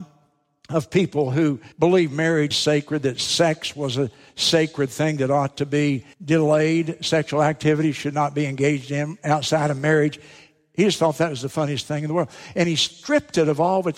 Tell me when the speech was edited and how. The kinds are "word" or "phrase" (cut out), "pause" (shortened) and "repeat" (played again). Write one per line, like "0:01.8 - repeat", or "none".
0:01.7 - pause
0:02.5 - word
0:06.1 - pause

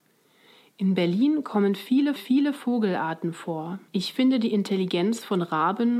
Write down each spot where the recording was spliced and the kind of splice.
0:02.2 - repeat
0:03.9 - pause

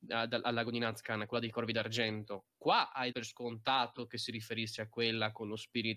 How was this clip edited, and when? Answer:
0:03.1 - word

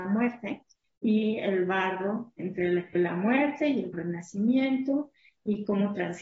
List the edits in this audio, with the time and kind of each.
0:02.4 - word
0:02.9 - word
0:03.9 - word

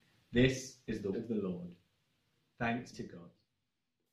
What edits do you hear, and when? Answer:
0:01.1 - word
0:02.9 - word

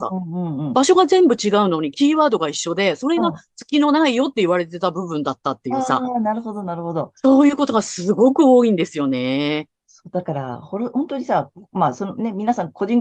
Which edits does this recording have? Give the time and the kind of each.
none

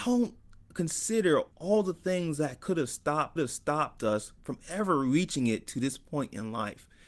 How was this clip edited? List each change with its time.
0:01.5 - pause
0:03.4 - repeat

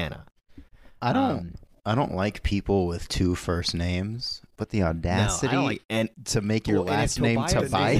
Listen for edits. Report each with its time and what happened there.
none

